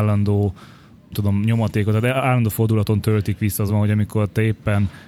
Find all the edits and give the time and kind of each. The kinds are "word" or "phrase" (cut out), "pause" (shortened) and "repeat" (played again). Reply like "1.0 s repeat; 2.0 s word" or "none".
1.1 s word; 3.7 s phrase